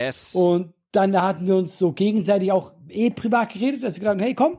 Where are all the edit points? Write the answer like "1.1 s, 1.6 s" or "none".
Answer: none

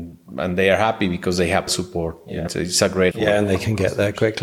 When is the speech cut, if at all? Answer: 1.7 s, 2.5 s, 3.1 s

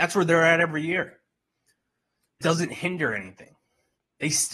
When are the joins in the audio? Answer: 2.4 s

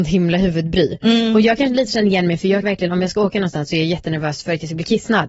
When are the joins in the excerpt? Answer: 2.6 s

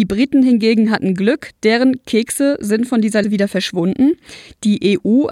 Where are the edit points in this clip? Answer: 3.2 s

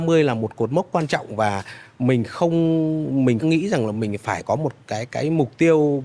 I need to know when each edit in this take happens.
3.4 s, 4.8 s

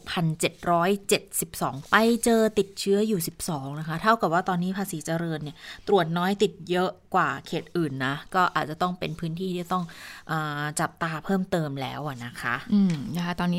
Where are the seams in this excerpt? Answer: 1.9 s

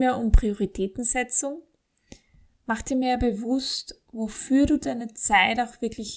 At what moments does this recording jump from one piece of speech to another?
none

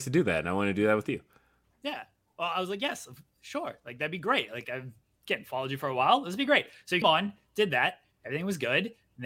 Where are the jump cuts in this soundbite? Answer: 7.0 s

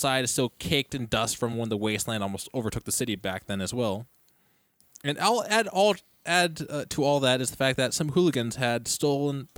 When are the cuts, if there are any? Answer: none

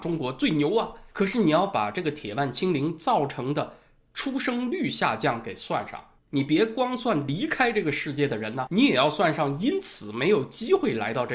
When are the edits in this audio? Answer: 1.1 s, 6.2 s, 8.7 s

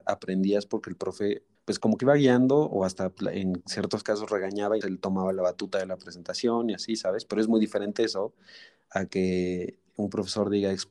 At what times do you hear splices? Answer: 1.5 s, 2.0 s, 4.8 s

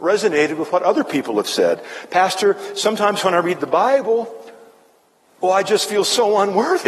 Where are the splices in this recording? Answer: none

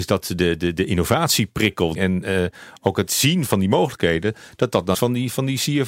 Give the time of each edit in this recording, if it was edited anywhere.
2.0 s, 3.1 s, 3.5 s, 4.9 s

